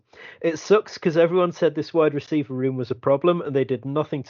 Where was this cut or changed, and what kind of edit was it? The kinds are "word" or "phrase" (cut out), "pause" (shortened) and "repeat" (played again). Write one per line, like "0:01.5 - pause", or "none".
none